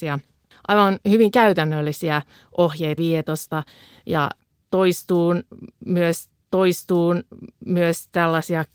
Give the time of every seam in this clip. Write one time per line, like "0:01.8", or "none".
0:03.0
0:06.3